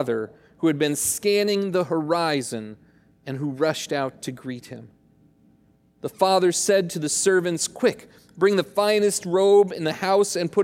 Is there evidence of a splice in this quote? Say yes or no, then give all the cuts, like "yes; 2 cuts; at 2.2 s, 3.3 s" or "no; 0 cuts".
no; 0 cuts